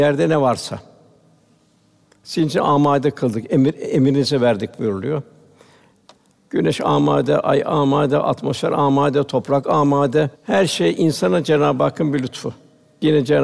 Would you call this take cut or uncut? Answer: cut